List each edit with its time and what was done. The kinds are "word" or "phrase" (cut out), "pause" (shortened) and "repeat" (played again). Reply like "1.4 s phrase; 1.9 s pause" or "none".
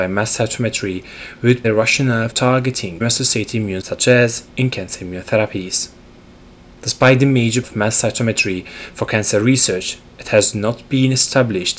1.6 s word; 2.3 s word; 3.0 s word; 3.8 s word; 4.5 s word; 7.6 s word